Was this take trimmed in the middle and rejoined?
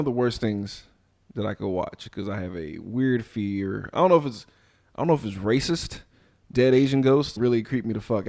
yes; 2 cuts; at 6.5 s, 7.4 s

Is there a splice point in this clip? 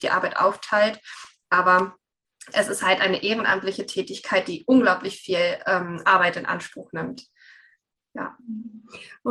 no; 0 cuts

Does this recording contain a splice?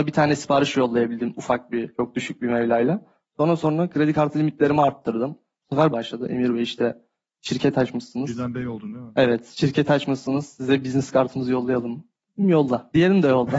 yes; 1 cut; at 5.9 s

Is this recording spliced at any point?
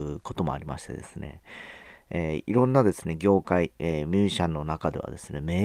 no; 0 cuts

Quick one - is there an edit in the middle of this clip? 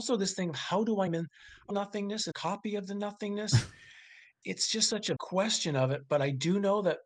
yes; 5 cuts; at 1.1 s, 1.7 s, 2.3 s, 4.4 s, 5.2 s

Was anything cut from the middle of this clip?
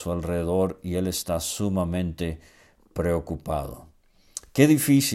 no; 0 cuts

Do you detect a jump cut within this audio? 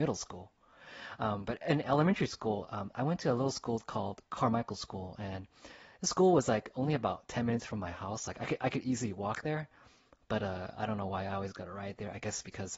no; 0 cuts

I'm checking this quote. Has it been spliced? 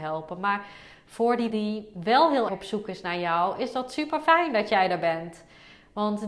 yes; 2 cuts; at 1.5 s, 2.5 s

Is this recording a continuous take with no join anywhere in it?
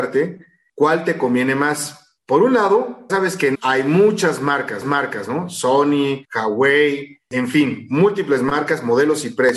no; 5 cuts; at 2.2 s, 3.1 s, 3.5 s, 4.8 s, 6.2 s

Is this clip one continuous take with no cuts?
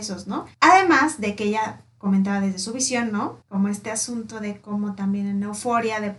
yes; 0 cuts

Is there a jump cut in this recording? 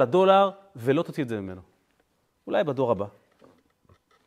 no; 0 cuts

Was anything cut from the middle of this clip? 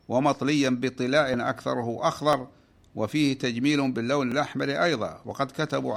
no; 0 cuts

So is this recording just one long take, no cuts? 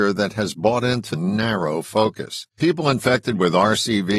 no; 2 cuts; at 1.1 s, 2.5 s

